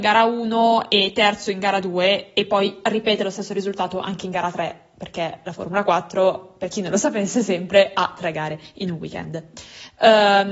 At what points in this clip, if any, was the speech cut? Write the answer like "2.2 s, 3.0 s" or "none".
none

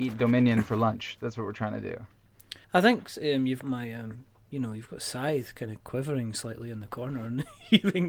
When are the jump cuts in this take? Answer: 2.6 s, 3.6 s

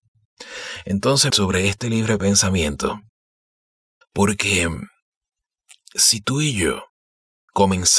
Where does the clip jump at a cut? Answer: 1.3 s

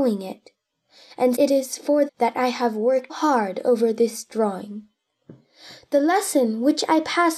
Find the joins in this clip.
1.4 s, 2.1 s, 3.1 s

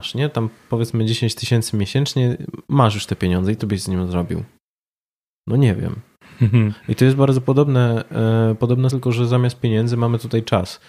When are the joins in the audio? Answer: 3.6 s, 8.9 s

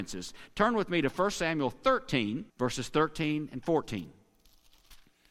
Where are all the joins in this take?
2.5 s

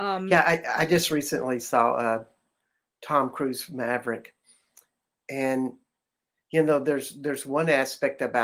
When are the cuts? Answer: none

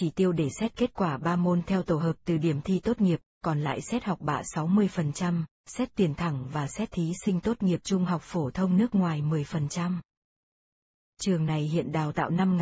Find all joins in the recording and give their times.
none

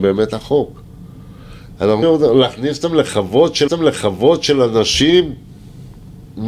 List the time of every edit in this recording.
2.0 s, 3.7 s

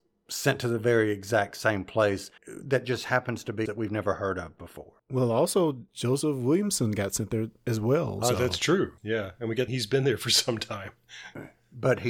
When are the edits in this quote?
2.4 s, 3.7 s, 5.0 s, 9.0 s, 9.7 s

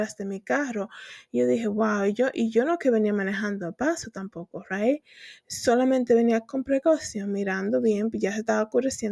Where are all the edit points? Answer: none

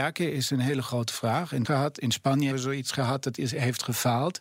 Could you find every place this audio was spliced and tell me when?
1.6 s, 2.5 s

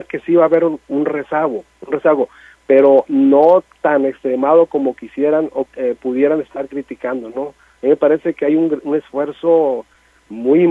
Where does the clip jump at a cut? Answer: 5.7 s

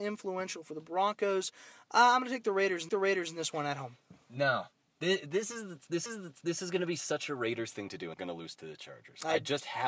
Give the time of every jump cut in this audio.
2.9 s, 4.2 s, 6.1 s, 8.1 s

